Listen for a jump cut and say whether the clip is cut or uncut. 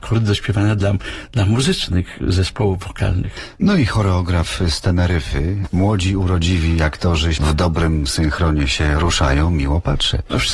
cut